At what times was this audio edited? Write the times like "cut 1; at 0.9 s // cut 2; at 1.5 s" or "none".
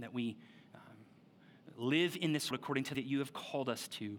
cut 1; at 2.5 s // cut 2; at 2.9 s